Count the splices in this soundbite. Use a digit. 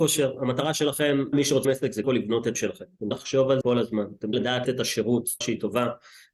9